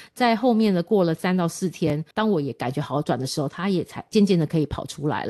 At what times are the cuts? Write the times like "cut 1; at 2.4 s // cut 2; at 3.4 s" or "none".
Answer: cut 1; at 2.1 s